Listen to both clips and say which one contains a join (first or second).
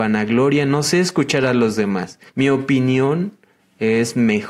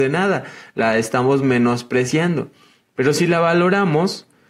first